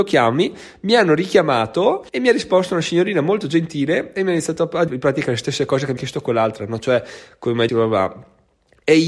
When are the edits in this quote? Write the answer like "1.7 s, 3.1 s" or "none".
2.1 s, 4.9 s, 6.0 s, 7.7 s